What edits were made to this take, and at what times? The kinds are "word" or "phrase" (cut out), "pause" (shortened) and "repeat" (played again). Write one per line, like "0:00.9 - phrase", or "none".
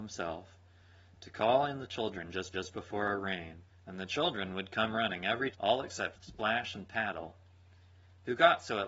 0:02.5 - repeat
0:03.7 - pause
0:05.5 - word
0:06.1 - word